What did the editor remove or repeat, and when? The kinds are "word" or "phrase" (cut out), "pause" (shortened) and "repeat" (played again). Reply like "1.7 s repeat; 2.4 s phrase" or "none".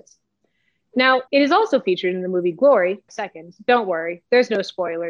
1.3 s pause; 3.1 s phrase